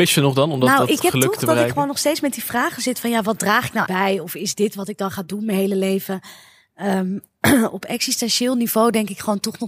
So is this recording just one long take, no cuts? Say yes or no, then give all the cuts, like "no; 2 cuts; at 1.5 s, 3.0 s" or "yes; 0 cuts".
no; 1 cut; at 3.9 s